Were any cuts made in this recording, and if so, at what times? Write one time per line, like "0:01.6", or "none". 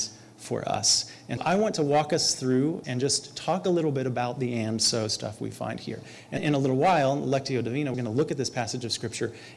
0:01.4
0:02.8
0:06.4
0:07.9